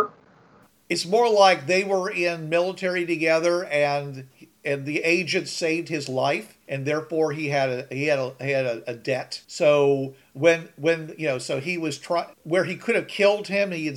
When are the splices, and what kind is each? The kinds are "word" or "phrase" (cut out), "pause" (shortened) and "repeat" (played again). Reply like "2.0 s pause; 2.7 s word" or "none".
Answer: 6.6 s pause; 9.4 s pause; 12.3 s pause